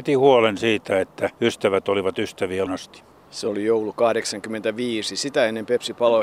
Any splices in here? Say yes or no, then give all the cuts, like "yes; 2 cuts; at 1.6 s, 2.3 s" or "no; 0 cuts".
yes; 2 cuts; at 1.3 s, 2.7 s